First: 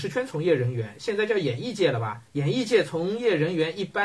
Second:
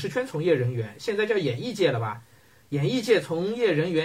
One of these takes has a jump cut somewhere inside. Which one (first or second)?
first